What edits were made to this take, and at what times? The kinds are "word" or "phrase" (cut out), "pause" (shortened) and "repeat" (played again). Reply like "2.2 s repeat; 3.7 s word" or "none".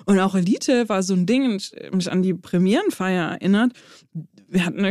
none

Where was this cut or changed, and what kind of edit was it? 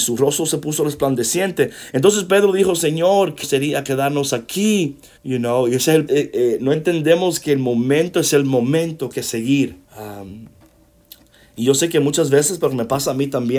3.4 s word; 5.2 s pause; 6.1 s phrase; 9.1 s phrase; 9.8 s pause

